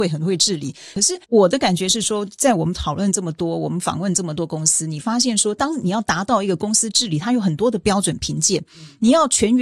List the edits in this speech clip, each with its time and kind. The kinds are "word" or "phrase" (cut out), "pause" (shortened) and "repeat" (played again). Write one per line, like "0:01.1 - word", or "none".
0:01.2 - pause